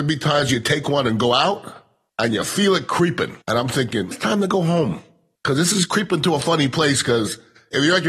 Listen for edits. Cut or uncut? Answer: cut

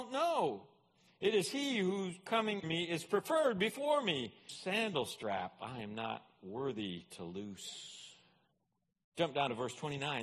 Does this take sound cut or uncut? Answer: cut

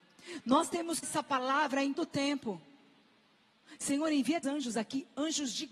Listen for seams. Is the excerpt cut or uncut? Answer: cut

